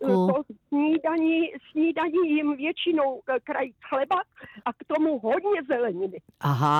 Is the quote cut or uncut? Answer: cut